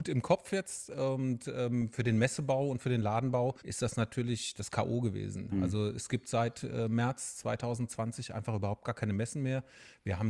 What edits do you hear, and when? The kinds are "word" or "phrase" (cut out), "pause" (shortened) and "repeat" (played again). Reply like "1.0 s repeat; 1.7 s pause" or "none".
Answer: 3.6 s pause